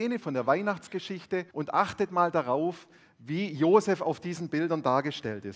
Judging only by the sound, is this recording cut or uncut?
cut